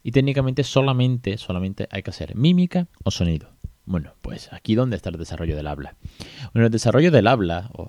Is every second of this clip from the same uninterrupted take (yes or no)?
no